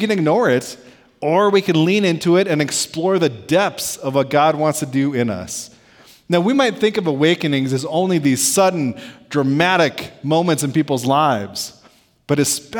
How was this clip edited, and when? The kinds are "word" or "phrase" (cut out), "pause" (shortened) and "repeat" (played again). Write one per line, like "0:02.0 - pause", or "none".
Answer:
none

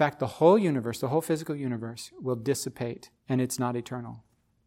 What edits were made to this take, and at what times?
0:03.2 - pause

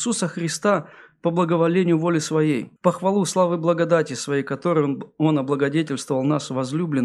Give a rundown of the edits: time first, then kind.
0:02.8 - pause

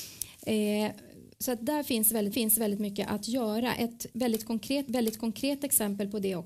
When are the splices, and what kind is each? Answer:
0:01.3 - pause
0:02.3 - repeat
0:04.9 - repeat

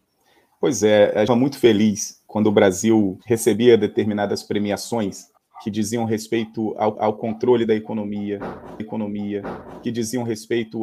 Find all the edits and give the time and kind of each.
0:01.3 - phrase
0:03.2 - pause
0:05.4 - pause
0:06.9 - repeat
0:08.8 - repeat

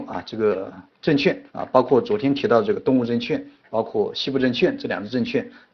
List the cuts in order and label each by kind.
0:01.5 - pause

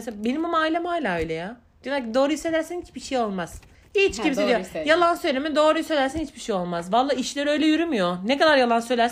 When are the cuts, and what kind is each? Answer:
0:03.7 - pause

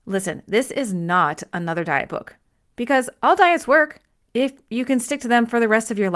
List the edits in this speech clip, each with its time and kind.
none

